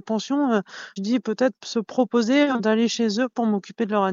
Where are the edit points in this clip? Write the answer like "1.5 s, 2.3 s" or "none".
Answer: 1.0 s, 2.6 s